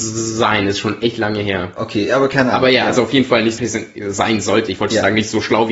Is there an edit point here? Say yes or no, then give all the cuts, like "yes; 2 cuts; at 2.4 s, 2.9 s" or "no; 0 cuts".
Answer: yes; 1 cut; at 3.6 s